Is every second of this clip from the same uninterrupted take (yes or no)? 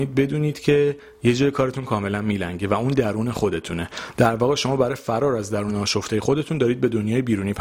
yes